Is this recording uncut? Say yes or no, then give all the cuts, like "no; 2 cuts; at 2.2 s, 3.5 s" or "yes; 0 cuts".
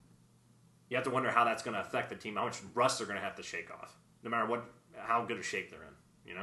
yes; 0 cuts